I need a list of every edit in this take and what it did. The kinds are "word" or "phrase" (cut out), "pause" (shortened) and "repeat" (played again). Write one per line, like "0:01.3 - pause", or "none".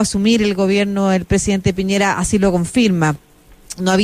none